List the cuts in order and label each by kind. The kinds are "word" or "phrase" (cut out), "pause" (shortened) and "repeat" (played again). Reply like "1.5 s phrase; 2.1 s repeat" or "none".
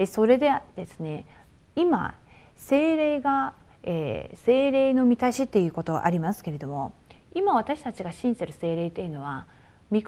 none